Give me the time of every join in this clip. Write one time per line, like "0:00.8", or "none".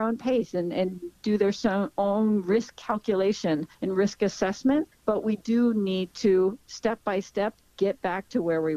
0:03.7
0:05.0